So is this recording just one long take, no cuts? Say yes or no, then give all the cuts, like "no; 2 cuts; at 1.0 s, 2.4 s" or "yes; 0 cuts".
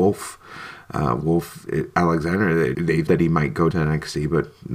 no; 4 cuts; at 1.7 s, 2.7 s, 3.1 s, 3.7 s